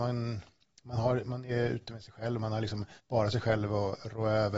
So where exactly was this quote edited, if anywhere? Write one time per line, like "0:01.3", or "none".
0:03.0